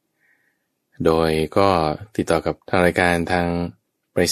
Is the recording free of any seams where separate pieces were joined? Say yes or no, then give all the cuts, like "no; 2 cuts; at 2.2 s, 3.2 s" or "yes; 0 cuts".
no; 1 cut; at 2.6 s